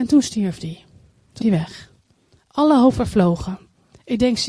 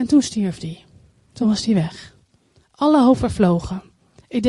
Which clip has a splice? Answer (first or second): first